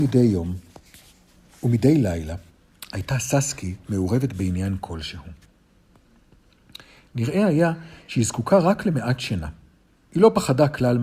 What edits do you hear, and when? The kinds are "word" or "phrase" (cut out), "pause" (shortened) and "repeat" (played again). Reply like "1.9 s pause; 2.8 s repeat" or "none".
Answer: none